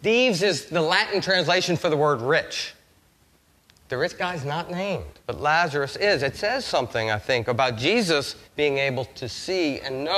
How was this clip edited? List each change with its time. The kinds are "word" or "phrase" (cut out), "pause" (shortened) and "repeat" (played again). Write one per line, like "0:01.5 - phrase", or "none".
0:05.2 - pause
0:08.4 - pause